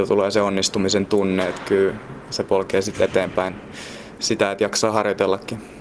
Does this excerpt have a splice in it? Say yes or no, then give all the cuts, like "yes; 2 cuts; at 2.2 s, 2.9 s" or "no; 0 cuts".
no; 0 cuts